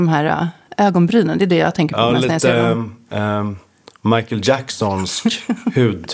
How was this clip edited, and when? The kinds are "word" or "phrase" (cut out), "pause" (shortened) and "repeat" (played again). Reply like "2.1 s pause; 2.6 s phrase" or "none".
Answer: none

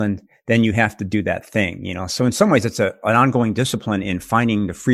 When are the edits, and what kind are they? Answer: none

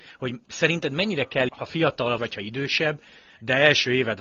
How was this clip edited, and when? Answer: 1.5 s word; 2.2 s word

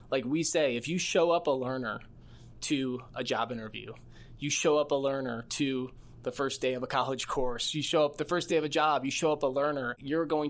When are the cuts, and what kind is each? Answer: none

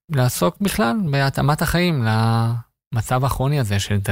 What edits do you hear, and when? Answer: none

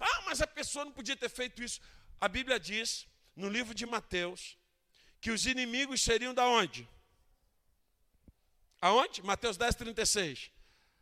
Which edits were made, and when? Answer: none

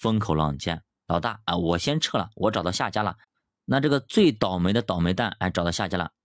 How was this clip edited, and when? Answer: none

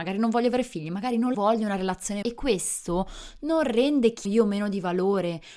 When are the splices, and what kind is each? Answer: 1.3 s word; 2.2 s word; 4.2 s word

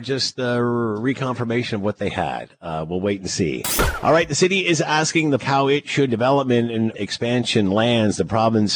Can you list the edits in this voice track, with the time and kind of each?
5.4 s word; 6.1 s word; 6.9 s word

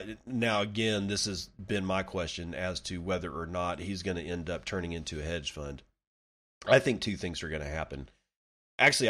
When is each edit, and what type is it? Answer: none

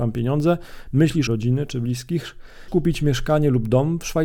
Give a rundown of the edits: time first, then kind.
1.3 s phrase; 2.7 s word

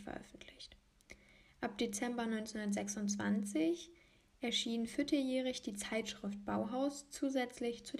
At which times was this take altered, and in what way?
none

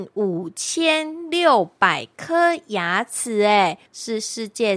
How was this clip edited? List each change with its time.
3.9 s pause

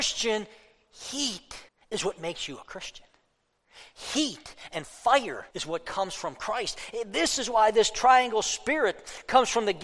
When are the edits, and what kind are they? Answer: 1.7 s pause; 5.5 s pause

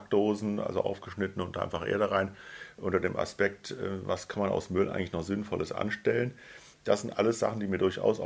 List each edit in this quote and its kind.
none

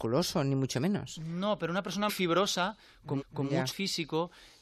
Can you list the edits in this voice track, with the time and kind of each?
2.1 s word; 3.2 s repeat; 3.7 s word

